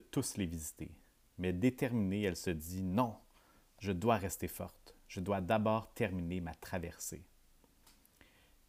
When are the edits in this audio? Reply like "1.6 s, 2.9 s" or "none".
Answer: none